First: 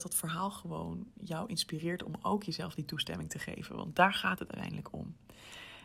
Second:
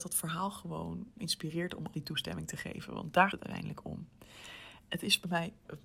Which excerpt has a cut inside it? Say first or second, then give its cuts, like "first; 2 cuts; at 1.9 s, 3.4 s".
second; 3 cuts; at 1.2 s, 1.9 s, 3.3 s